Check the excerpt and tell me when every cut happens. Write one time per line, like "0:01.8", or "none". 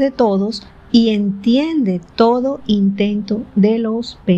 none